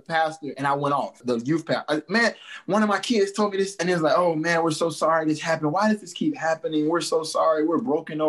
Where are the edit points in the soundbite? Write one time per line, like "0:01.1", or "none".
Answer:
0:03.8